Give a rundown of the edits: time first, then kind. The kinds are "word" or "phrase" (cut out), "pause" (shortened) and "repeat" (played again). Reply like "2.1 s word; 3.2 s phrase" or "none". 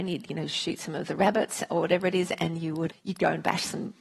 2.9 s word